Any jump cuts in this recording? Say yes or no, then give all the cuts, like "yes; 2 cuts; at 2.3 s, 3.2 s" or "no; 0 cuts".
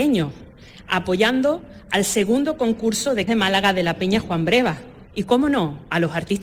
yes; 2 cuts; at 3.3 s, 5.1 s